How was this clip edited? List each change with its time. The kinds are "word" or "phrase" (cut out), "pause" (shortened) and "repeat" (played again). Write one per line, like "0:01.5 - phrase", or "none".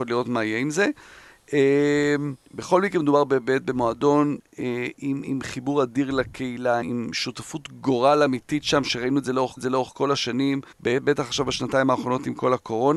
0:02.4 - pause
0:06.8 - word
0:09.6 - repeat
0:10.7 - pause